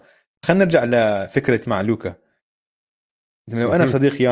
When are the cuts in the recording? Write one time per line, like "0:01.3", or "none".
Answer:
0:01.6